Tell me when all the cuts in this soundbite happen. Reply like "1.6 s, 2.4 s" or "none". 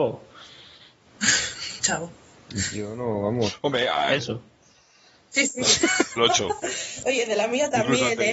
4.2 s, 6.2 s